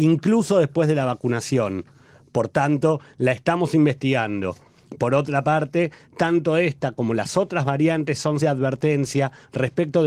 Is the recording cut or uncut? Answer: cut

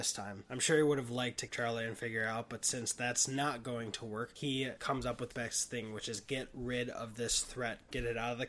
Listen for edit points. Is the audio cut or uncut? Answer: cut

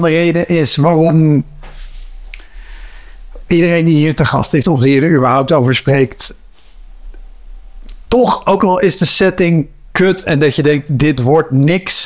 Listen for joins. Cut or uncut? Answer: cut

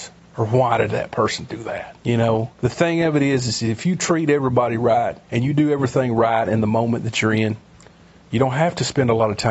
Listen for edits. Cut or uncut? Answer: cut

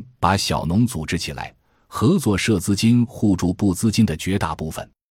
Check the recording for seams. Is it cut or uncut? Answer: uncut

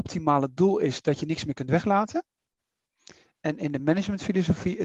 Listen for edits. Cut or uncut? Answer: uncut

